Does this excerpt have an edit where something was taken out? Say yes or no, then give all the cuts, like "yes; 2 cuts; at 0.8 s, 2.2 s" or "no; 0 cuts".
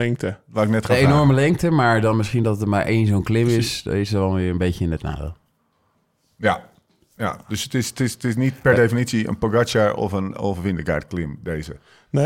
no; 0 cuts